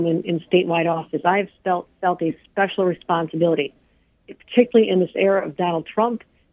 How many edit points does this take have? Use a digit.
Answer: 0